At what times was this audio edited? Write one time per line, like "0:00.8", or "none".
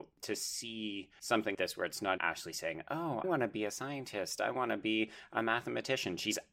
0:01.5
0:02.2
0:03.2